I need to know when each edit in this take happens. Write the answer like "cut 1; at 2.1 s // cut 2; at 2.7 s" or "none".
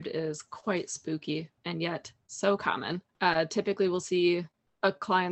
cut 1; at 1.6 s // cut 2; at 3.1 s